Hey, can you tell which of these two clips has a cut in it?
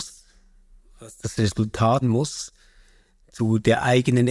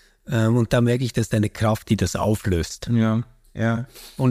first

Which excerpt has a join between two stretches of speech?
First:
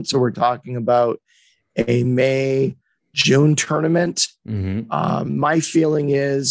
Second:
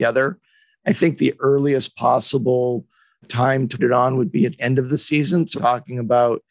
second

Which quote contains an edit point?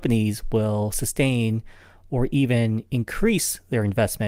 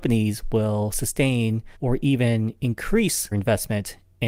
second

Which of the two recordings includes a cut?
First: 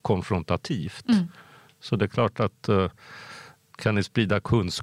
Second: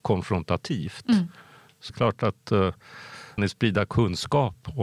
second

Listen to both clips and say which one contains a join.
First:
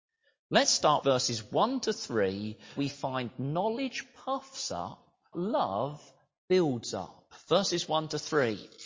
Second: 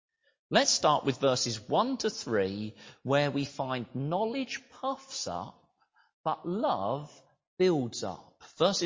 first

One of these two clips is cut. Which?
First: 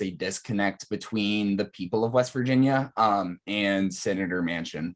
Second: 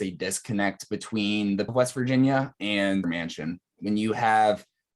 second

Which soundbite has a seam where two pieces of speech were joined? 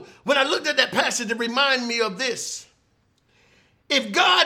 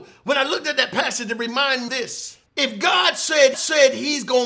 second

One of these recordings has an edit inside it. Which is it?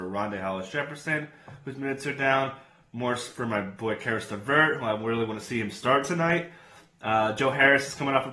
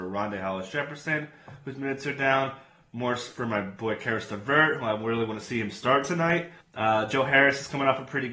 second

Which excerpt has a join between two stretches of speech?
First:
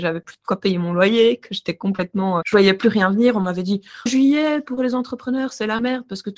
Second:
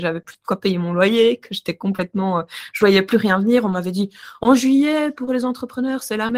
first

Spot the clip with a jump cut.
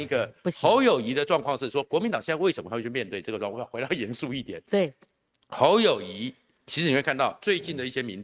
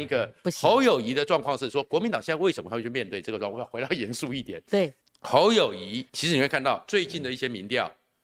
second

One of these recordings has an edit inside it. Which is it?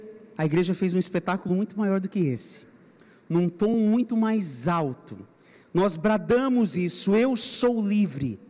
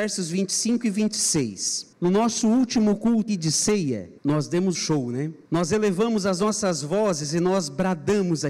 second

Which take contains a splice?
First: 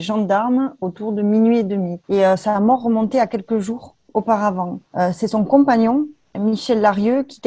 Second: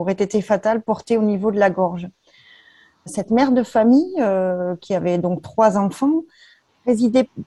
first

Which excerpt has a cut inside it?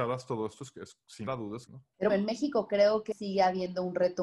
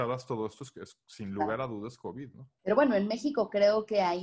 first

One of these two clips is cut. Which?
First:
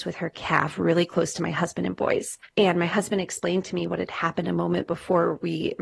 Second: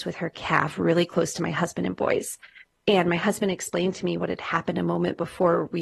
first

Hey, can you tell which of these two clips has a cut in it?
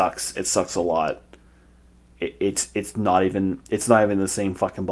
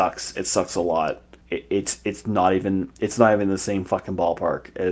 second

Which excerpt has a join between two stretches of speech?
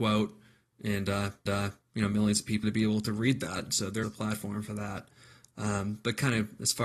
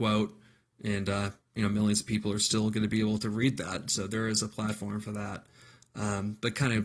first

